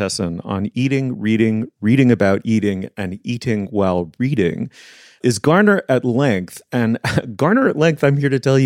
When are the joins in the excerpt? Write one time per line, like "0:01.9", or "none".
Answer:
none